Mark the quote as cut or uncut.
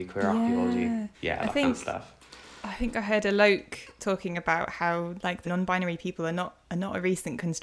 cut